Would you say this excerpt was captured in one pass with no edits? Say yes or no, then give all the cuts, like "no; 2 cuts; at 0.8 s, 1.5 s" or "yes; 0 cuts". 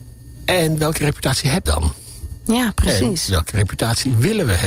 no; 1 cut; at 1.7 s